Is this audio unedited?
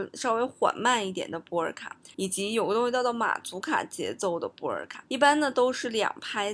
no; 2 cuts; at 2.1 s, 5.1 s

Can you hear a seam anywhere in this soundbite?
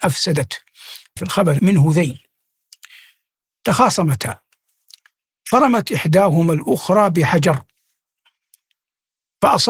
yes; 2 cuts; at 1.2 s, 1.6 s

